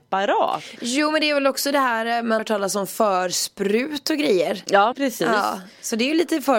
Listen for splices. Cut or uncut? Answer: cut